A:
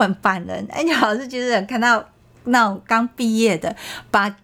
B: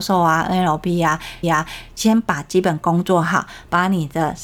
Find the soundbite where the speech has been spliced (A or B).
B